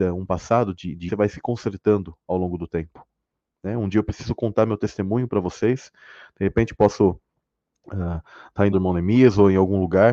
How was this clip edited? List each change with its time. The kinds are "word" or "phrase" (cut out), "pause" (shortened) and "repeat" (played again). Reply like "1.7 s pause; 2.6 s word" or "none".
1.1 s phrase; 8.7 s phrase